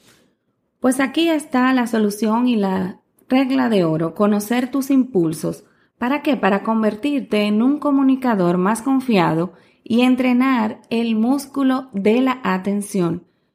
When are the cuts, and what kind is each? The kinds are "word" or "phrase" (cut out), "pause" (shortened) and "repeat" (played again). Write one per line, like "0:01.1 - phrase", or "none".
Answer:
none